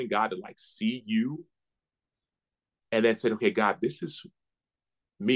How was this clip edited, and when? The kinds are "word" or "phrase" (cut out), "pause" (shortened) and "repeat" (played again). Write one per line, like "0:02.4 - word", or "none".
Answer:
none